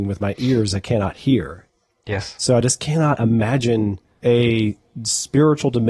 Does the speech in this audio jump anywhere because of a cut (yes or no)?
no